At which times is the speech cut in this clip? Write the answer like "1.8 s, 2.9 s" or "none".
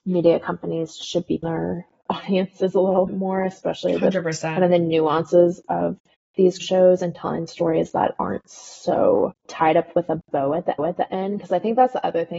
1.4 s, 3.1 s, 6.6 s, 9.4 s, 10.8 s